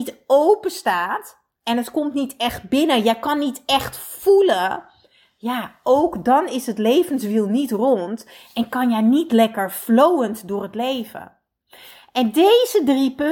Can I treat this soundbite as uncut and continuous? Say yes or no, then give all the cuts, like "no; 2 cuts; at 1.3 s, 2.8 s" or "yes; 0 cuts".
yes; 0 cuts